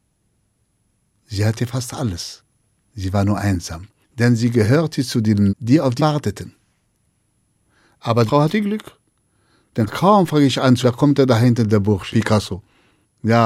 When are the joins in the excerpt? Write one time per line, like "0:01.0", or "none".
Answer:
0:05.5
0:06.0
0:08.3
0:10.8
0:12.1

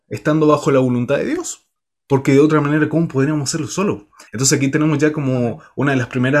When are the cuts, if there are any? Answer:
0:01.8
0:04.3

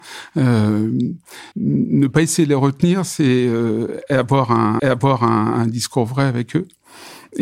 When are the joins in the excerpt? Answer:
0:01.5
0:04.8

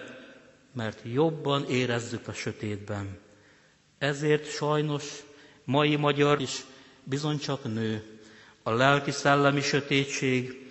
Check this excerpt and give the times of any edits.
0:02.2
0:06.4

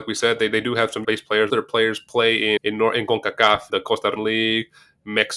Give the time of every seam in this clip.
0:01.0
0:01.5
0:02.6
0:03.7
0:04.2

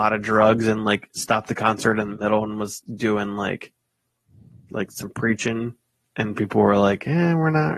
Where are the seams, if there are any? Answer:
none

